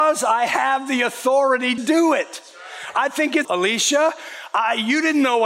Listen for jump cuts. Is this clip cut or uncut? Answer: cut